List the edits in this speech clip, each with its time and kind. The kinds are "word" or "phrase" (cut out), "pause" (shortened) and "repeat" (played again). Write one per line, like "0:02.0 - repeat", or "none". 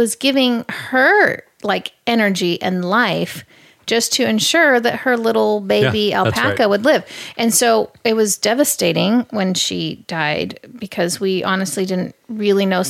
none